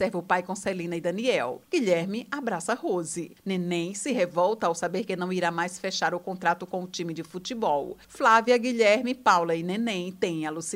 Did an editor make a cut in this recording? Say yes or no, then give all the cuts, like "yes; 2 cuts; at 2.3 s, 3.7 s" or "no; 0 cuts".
no; 0 cuts